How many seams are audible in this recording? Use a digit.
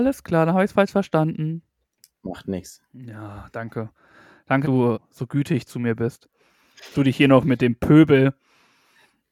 3